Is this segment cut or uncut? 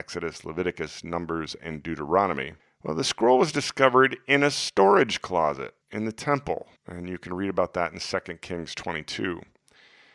cut